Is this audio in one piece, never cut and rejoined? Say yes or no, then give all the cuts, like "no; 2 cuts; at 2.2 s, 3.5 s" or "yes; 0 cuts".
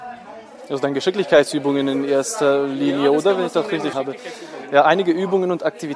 no; 1 cut; at 3.9 s